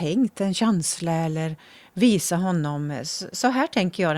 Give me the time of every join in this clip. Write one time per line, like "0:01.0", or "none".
none